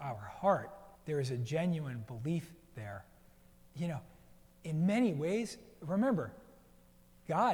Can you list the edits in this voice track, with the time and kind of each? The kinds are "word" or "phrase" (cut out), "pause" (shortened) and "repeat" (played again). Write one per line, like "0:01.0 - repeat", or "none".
0:01.0 - pause